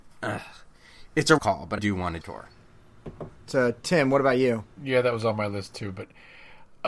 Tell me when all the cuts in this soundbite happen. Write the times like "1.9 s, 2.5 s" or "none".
1.4 s, 1.8 s, 2.2 s, 4.7 s